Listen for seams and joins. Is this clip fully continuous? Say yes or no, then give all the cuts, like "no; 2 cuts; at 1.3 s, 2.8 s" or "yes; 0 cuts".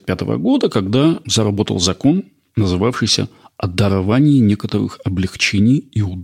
yes; 0 cuts